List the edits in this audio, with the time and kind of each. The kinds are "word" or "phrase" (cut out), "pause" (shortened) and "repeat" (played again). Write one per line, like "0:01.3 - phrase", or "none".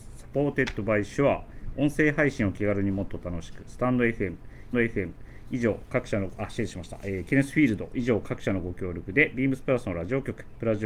0:04.7 - repeat

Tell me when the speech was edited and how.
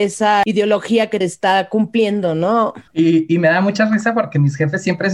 0:01.2 - phrase
0:02.9 - pause

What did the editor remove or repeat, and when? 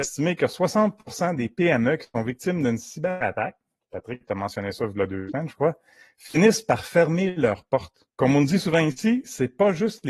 0:08.1 - pause

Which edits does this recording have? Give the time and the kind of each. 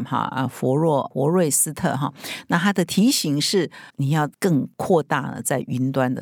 0:03.9 - pause

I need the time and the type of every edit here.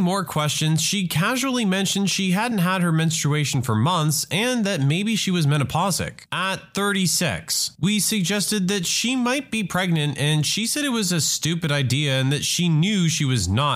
none

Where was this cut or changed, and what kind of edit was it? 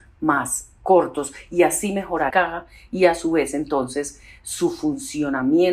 0:02.3 - phrase

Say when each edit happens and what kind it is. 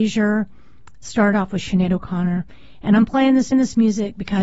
0:03.5 - repeat

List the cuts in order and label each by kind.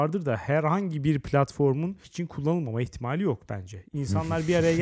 0:02.0 - word

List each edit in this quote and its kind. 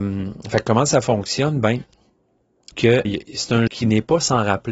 0:02.7 - word
0:03.0 - word
0:03.7 - word

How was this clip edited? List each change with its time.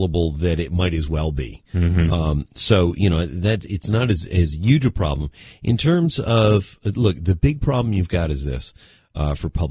none

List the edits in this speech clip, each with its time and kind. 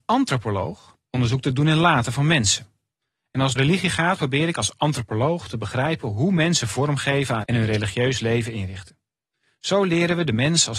0:01.0 - pause
0:03.6 - word
0:07.4 - word

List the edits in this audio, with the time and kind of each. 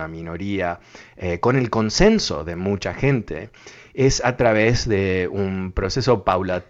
none

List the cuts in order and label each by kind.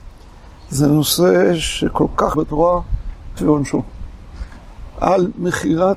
0:02.3 - word
0:03.4 - word

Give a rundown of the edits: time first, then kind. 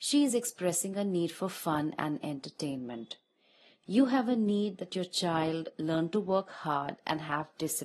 none

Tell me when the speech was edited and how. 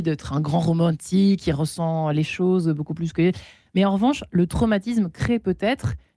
none

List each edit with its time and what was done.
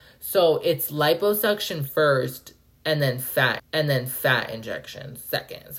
0:03.6 - repeat

